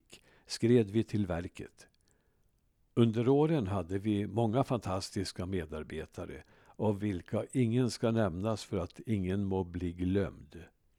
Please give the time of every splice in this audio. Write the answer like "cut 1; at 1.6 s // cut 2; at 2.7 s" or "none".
none